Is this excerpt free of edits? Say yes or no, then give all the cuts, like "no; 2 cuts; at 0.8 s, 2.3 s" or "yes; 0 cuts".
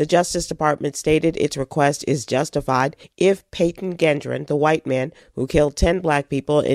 yes; 0 cuts